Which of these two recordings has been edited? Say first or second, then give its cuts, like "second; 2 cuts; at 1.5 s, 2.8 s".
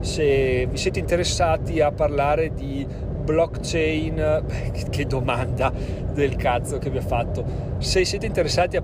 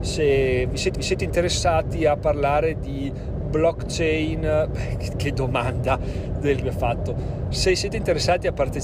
second; 2 cuts; at 0.9 s, 6.6 s